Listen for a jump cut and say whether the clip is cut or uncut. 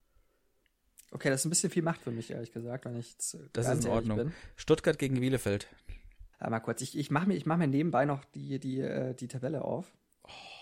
cut